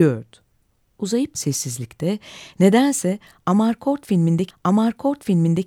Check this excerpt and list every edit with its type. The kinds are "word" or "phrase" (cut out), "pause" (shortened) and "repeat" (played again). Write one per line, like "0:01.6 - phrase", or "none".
0:01.3 - word
0:04.5 - repeat